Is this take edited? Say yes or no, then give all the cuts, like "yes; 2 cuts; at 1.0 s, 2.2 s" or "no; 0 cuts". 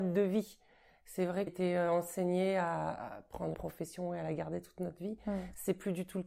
yes; 2 cuts; at 1.5 s, 3.5 s